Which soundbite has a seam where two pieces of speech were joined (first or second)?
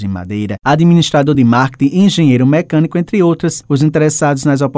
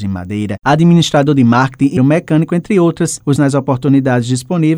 second